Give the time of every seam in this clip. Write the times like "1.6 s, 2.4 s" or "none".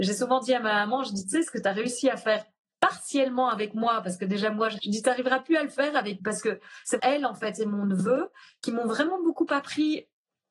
4.8 s, 6.2 s, 7.0 s